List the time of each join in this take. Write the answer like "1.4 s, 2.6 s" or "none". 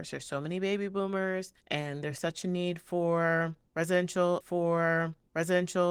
1.6 s, 4.4 s